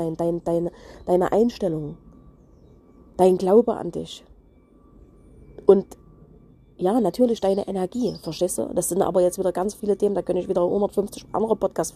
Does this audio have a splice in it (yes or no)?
no